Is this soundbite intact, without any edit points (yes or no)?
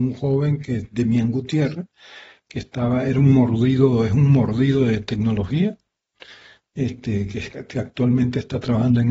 yes